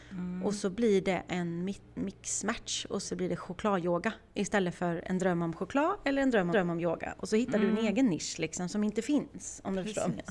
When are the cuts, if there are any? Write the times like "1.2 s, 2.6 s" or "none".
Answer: 1.9 s, 3.0 s, 6.5 s